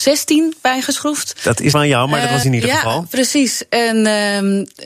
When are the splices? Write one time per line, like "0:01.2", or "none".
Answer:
0:01.7
0:02.4